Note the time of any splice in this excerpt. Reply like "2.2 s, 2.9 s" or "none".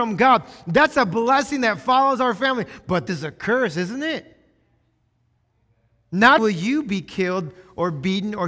3.1 s, 6.4 s